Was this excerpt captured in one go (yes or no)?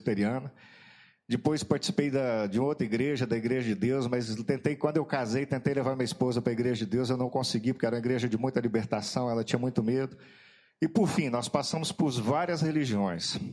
yes